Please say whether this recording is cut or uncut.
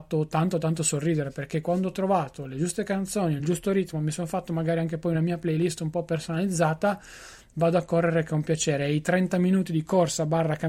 uncut